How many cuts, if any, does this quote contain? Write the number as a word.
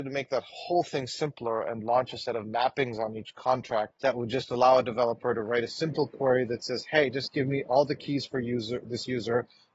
one